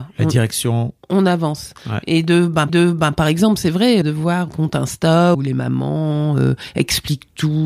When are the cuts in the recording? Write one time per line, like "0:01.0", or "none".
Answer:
0:01.0
0:02.7
0:04.0
0:04.5
0:05.3